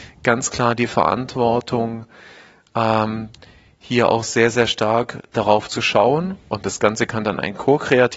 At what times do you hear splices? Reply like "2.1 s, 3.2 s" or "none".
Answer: none